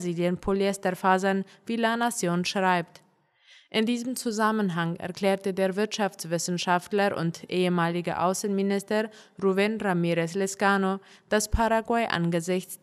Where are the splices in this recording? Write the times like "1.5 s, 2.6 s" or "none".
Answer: none